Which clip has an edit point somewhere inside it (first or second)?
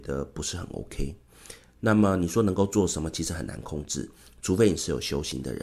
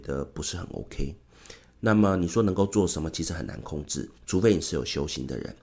second